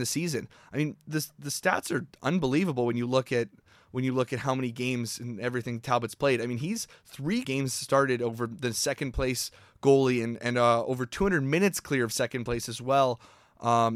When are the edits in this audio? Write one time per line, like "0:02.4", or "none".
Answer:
0:07.4